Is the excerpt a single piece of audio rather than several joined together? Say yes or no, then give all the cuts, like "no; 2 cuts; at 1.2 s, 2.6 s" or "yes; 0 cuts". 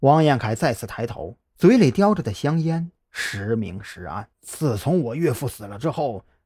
no; 2 cuts; at 1.5 s, 4.3 s